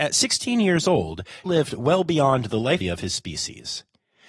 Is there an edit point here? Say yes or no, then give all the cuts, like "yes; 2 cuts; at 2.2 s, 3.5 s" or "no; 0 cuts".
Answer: yes; 2 cuts; at 1.5 s, 2.8 s